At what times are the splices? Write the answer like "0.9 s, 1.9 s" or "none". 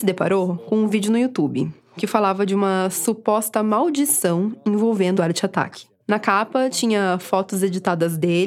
5.2 s, 6.0 s